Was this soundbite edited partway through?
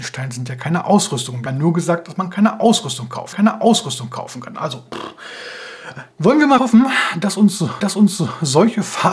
yes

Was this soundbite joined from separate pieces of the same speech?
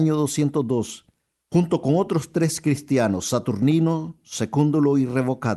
no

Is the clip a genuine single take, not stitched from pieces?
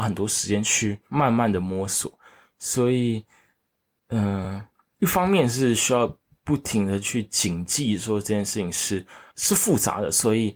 yes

